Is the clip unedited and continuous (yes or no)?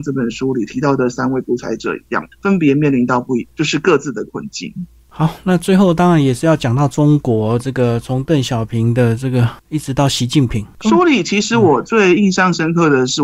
no